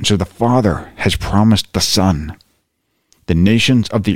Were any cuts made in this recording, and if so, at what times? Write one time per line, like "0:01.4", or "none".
none

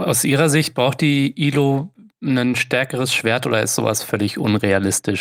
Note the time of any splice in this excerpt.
none

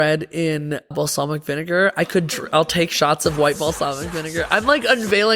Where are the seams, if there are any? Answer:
0:00.9
0:03.6

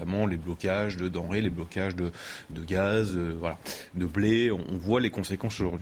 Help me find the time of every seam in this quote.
none

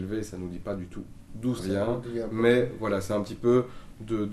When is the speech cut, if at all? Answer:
0:01.6

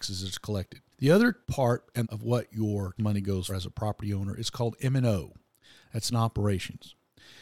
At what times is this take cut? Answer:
0:00.9
0:01.4
0:02.0
0:03.0
0:03.5
0:06.1

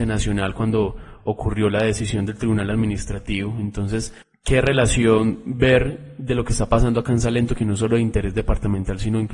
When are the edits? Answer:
0:04.2

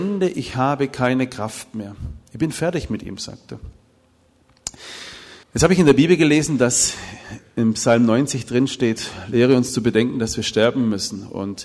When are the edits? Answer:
0:05.4

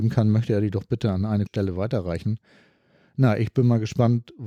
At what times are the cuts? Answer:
0:01.5

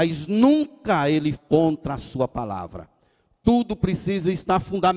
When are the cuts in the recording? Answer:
0:01.3

